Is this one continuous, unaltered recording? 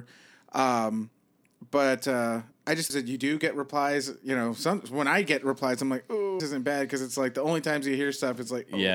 no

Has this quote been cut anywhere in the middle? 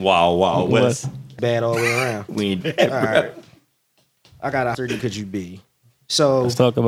yes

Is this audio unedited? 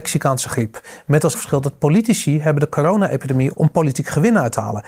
no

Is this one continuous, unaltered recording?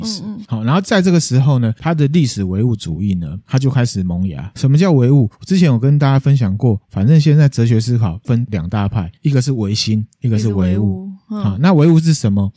no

